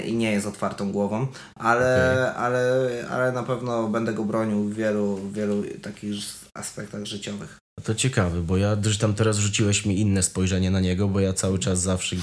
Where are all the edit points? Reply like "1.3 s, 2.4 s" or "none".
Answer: none